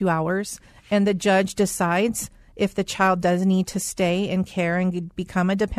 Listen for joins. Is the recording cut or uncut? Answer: uncut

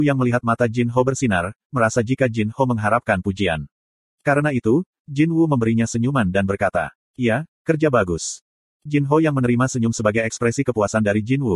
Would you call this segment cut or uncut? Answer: uncut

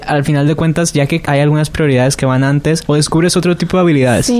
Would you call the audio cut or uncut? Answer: cut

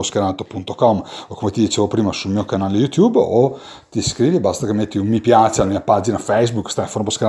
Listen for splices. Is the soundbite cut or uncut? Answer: uncut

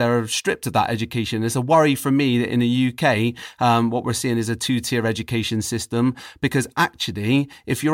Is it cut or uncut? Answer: uncut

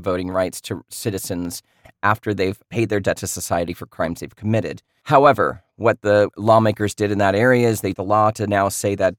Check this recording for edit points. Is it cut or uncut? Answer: cut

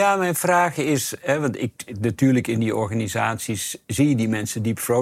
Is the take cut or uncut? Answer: uncut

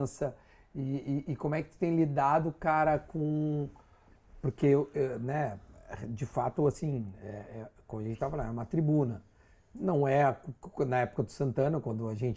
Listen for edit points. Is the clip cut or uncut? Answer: uncut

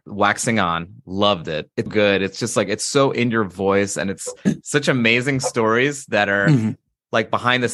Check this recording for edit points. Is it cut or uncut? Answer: cut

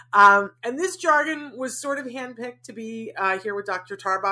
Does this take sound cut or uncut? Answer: uncut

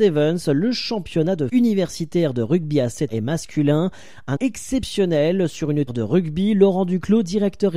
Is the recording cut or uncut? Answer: cut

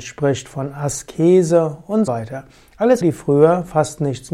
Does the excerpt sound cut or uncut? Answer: cut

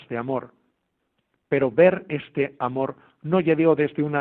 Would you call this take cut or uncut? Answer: uncut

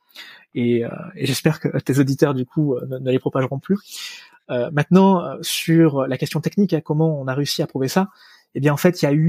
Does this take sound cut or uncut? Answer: uncut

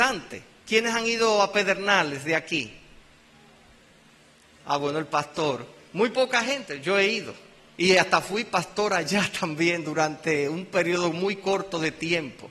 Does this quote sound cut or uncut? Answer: uncut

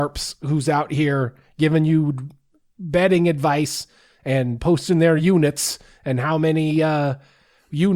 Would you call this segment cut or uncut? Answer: uncut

